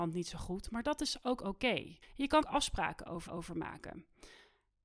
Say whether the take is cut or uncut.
cut